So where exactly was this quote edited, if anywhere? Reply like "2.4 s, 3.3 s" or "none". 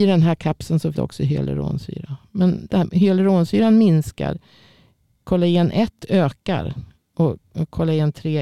0.9 s, 2.7 s